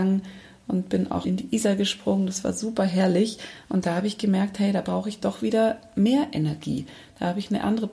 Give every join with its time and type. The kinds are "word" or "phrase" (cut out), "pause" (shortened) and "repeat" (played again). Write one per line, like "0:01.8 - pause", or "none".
0:01.2 - word